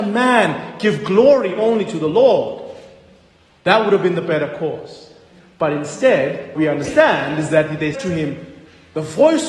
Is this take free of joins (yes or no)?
no